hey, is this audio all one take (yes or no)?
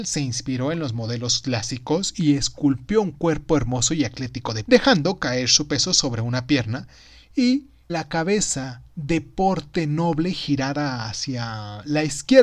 no